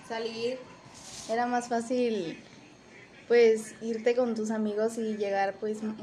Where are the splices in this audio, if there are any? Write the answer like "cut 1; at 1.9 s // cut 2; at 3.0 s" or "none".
none